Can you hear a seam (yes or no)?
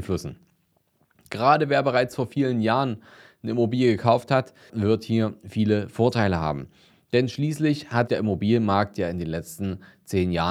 yes